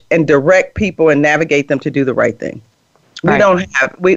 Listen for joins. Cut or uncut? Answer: uncut